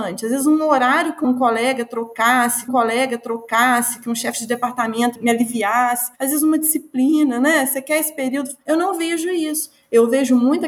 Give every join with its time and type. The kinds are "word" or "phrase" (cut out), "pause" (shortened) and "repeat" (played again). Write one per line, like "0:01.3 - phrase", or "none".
0:01.2 - word
0:02.7 - repeat
0:05.1 - word